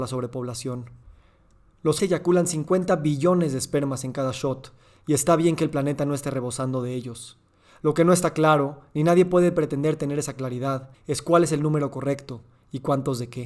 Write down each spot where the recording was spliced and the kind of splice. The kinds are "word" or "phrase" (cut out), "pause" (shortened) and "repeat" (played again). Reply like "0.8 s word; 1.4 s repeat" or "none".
2.0 s word; 10.9 s pause